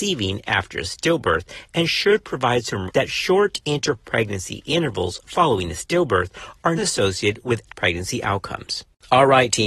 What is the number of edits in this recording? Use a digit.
3